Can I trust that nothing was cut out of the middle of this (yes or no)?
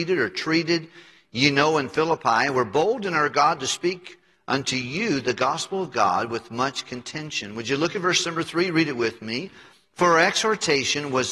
yes